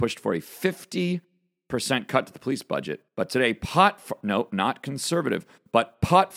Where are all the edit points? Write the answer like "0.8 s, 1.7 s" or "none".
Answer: 3.1 s